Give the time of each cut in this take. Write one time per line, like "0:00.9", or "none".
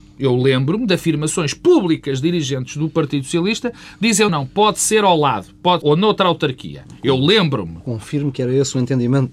0:04.3
0:05.8